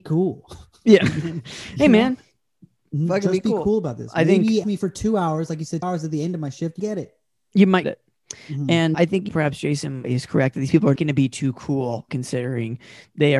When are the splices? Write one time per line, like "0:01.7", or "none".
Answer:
0:04.6
0:05.8
0:06.8
0:07.8
0:08.9
0:09.3
0:10.0
0:11.0
0:12.1